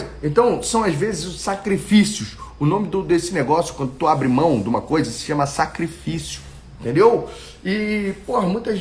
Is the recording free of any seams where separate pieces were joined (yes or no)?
yes